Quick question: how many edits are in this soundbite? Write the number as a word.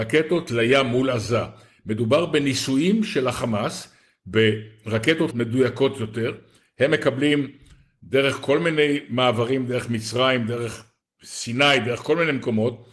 one